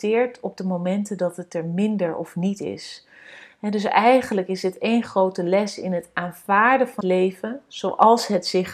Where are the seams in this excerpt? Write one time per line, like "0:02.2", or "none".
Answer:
0:07.0